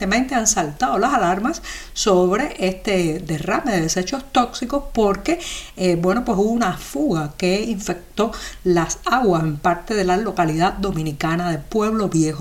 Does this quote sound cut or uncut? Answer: uncut